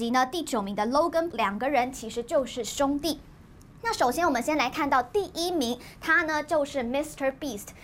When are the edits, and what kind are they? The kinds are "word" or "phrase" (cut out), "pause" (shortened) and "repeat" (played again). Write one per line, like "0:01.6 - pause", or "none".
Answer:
0:01.3 - word